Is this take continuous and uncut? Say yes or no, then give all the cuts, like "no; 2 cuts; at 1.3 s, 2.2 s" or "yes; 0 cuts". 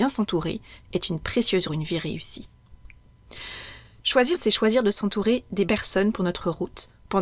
no; 4 cuts; at 1.7 s, 4.4 s, 5.7 s, 6.2 s